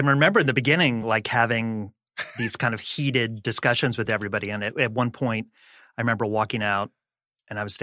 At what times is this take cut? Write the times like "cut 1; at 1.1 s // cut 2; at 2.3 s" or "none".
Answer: none